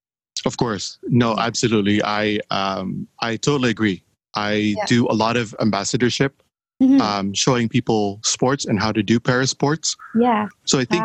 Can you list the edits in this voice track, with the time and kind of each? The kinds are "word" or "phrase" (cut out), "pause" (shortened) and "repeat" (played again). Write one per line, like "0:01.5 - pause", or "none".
none